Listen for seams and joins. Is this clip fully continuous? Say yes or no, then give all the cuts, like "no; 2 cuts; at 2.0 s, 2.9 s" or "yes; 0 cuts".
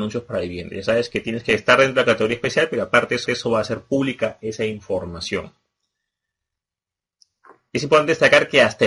no; 1 cut; at 3.3 s